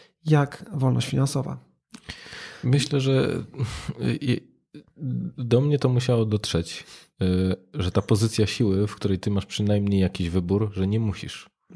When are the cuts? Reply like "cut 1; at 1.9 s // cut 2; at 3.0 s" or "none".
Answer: none